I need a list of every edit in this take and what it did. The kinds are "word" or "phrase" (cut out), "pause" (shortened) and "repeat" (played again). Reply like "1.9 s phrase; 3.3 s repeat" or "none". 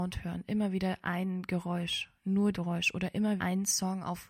2.5 s phrase; 3.4 s word

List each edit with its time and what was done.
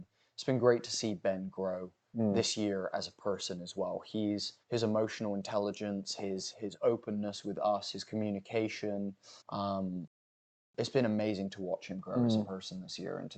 4.6 s pause; 9.4 s pause

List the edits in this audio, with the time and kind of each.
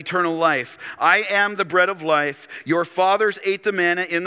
none

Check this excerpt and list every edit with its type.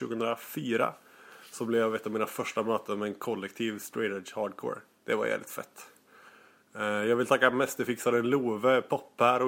none

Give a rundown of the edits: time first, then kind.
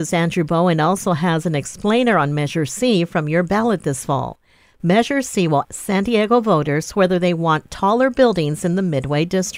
5.6 s word

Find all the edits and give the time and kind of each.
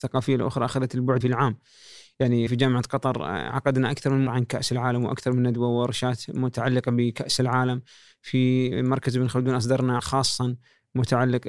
1.2 s word; 2.5 s word; 4.3 s word; 10.0 s word

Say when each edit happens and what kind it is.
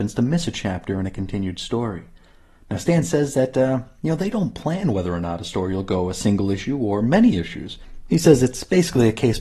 none

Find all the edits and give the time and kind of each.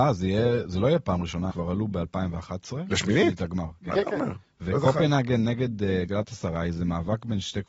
1.5 s word

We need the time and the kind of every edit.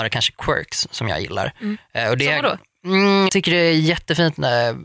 3.3 s word

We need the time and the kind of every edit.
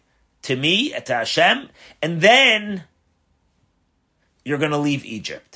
none

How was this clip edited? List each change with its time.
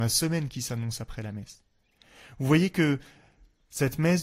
none

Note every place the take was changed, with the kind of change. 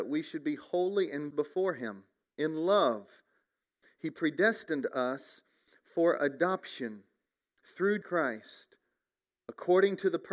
1.3 s word; 8.0 s word

